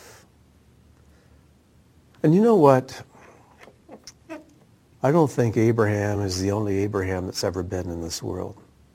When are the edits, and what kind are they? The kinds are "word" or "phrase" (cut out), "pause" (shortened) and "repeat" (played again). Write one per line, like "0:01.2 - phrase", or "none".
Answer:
none

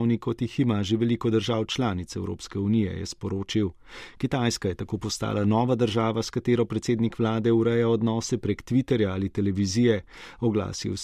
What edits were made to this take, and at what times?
none

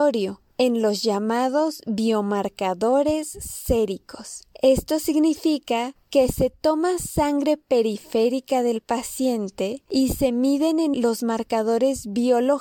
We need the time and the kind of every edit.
0:10.9 - word

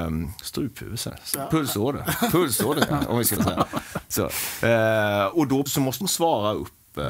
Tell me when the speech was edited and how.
0:01.1 - word
0:02.9 - word
0:03.4 - word
0:05.3 - word
0:05.7 - word
0:06.0 - word

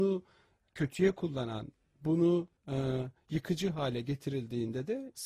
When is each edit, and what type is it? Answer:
0:02.6 - pause

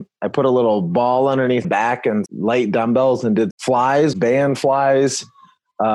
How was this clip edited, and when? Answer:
0:01.6 - word
0:02.3 - word
0:03.5 - word
0:04.1 - word

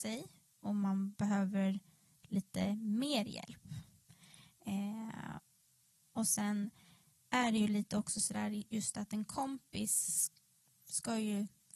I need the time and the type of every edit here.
none

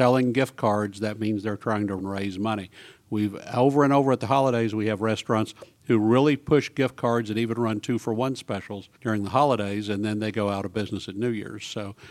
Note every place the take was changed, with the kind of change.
0:02.0 - phrase
0:08.9 - pause

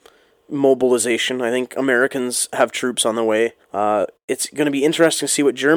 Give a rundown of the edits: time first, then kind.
0:03.6 - pause

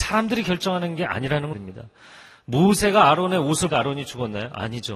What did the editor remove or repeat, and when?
0:01.5 - word
0:03.7 - word

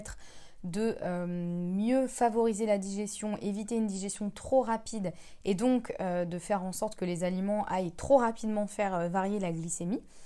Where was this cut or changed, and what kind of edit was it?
none

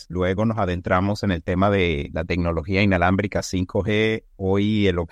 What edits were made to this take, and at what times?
none

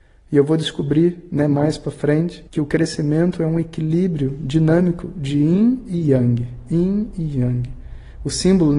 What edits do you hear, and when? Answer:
0:02.5 - pause

